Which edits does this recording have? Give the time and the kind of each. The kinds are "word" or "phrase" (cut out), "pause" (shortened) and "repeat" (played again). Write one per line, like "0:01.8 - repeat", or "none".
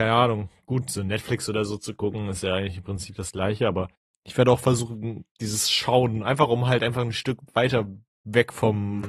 0:03.9 - pause
0:05.3 - pause